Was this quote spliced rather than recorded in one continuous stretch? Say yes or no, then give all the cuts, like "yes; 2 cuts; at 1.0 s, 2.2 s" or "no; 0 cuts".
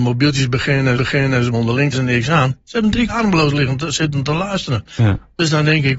yes; 4 cuts; at 1.0 s, 1.5 s, 1.9 s, 3.1 s